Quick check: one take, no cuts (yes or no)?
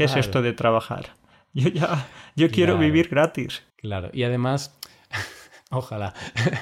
no